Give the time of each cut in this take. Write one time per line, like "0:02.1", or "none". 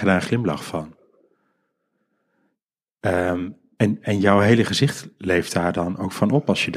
none